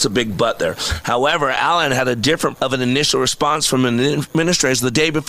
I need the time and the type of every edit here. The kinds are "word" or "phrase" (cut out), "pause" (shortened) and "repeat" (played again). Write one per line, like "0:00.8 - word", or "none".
0:02.6 - word